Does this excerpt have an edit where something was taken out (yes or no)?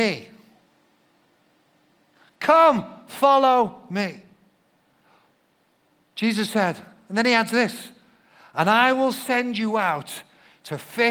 no